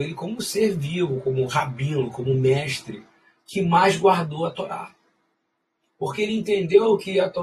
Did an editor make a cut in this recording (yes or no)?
no